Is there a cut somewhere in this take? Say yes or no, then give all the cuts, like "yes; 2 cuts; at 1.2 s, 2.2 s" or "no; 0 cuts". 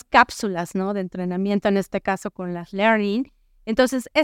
no; 0 cuts